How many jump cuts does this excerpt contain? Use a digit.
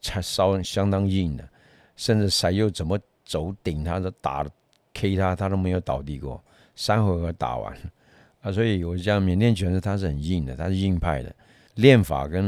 0